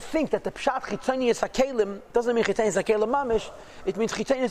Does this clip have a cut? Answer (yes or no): no